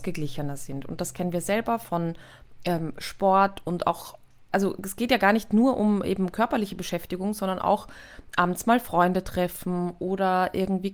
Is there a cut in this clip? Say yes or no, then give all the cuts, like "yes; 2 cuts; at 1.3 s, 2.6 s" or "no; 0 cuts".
no; 0 cuts